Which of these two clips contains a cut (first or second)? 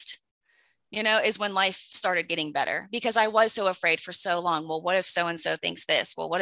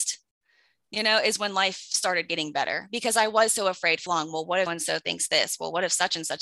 second